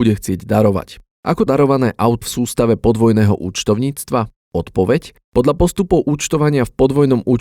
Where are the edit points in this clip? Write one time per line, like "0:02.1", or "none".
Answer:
0:01.5
0:02.2